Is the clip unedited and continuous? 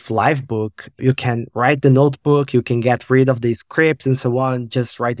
yes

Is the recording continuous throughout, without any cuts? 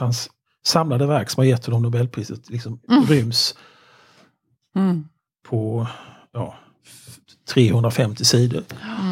yes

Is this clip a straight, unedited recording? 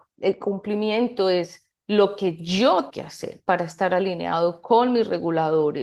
no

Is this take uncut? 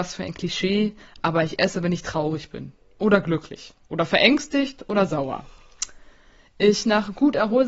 yes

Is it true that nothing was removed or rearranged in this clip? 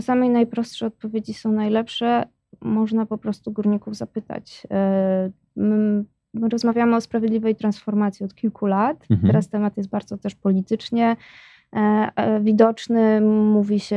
no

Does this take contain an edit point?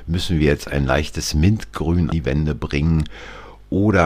yes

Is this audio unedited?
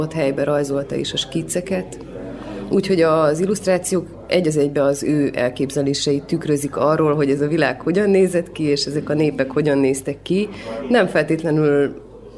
yes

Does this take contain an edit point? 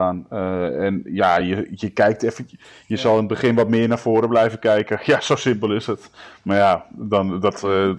no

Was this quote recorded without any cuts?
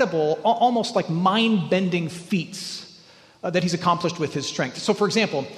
yes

